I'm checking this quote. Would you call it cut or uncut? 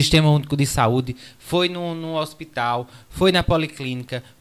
uncut